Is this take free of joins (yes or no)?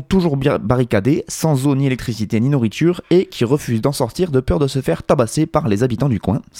yes